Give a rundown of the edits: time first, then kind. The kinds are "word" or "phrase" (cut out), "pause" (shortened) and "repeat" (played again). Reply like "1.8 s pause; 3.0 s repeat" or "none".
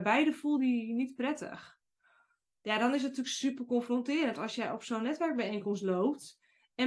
none